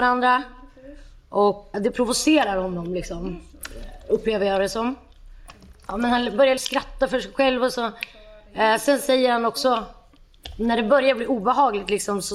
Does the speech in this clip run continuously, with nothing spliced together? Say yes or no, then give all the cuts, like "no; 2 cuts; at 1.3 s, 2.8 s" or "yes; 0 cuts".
no; 2 cuts; at 1.7 s, 6.6 s